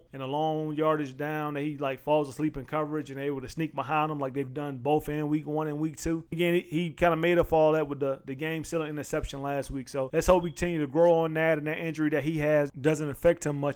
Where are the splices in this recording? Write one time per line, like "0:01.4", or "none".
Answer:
0:06.3